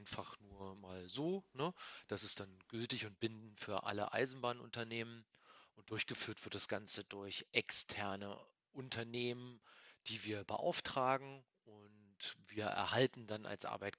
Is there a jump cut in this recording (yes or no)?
no